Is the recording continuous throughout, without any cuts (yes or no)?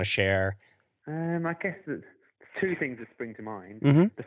yes